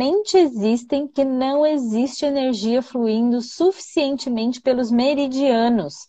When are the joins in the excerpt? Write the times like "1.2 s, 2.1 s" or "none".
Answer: 1.2 s

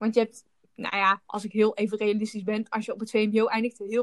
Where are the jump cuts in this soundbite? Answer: 1.2 s

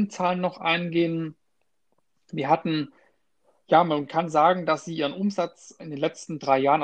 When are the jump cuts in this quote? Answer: 5.8 s

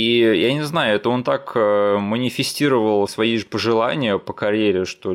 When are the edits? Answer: none

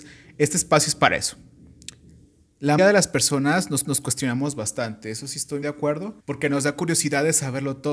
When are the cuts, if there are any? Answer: 2.8 s, 3.9 s, 5.6 s, 6.2 s

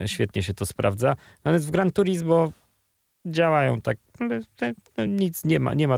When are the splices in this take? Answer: none

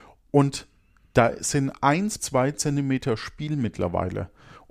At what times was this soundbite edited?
2.2 s

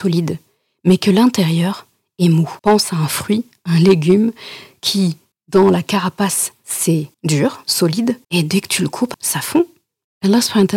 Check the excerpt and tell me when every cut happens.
2.6 s, 5.3 s, 7.1 s, 8.2 s, 9.1 s

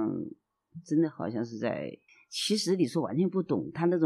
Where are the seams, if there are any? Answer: 2.1 s

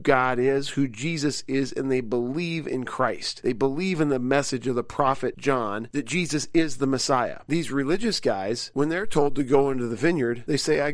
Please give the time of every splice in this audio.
none

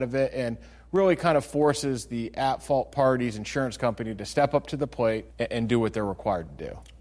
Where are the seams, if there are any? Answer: 5.3 s

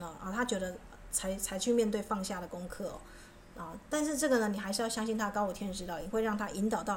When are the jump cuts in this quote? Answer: none

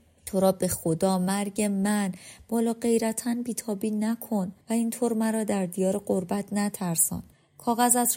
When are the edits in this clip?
4.6 s

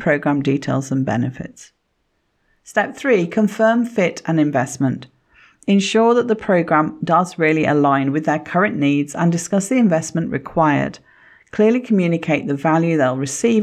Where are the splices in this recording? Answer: none

